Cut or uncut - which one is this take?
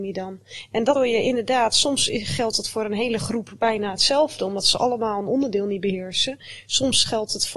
cut